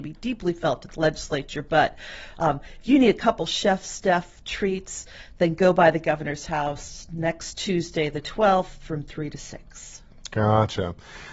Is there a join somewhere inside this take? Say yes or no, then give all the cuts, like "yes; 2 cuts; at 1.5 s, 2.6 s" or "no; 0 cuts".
no; 0 cuts